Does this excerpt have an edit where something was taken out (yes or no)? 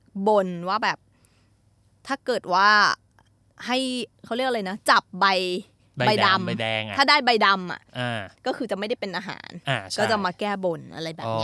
no